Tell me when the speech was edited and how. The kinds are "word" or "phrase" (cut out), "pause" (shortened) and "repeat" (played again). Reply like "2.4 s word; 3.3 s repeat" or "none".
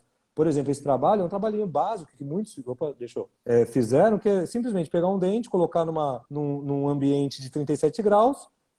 3.4 s pause; 6.3 s pause